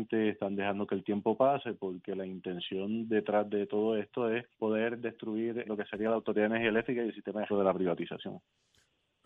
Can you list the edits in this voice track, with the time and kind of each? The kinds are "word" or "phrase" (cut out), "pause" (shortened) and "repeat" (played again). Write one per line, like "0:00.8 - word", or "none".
0:04.5 - pause
0:05.6 - word
0:07.5 - phrase

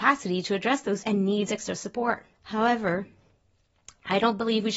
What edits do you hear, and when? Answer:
0:01.0 - word
0:02.3 - pause

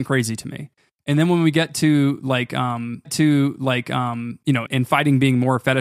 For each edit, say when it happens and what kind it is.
0:03.0 - repeat
0:04.7 - word

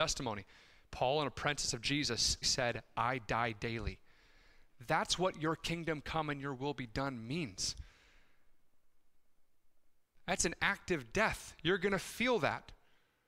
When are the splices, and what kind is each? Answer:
0:02.4 - word

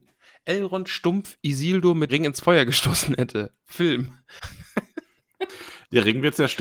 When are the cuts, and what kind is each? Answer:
0:02.1 - word

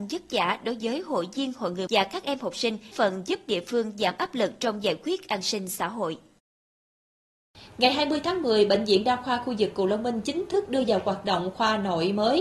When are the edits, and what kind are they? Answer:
0:01.9 - word
0:02.9 - word

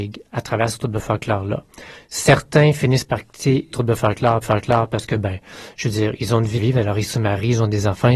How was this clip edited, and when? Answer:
0:03.7 - word
0:04.4 - repeat
0:06.6 - word

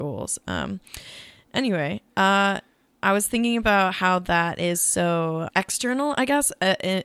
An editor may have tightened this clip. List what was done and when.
0:05.5 - word

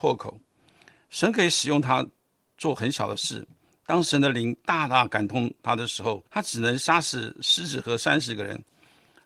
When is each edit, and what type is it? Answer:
0:06.3 - pause

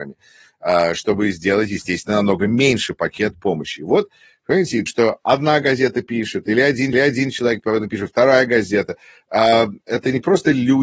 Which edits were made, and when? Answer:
0:04.9 - phrase
0:06.9 - repeat

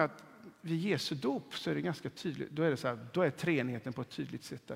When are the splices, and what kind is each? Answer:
none

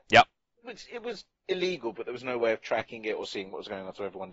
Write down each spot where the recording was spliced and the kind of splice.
none

